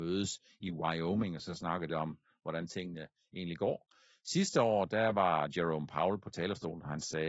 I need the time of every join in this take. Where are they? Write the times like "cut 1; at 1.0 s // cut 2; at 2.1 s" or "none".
cut 1; at 1.9 s